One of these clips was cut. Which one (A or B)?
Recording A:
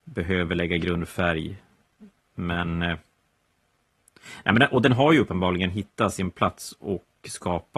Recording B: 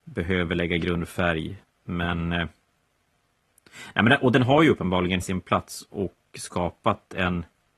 B